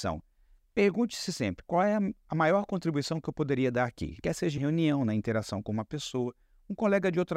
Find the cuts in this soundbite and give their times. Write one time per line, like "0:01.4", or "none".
0:04.6